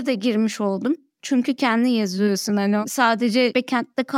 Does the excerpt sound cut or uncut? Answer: uncut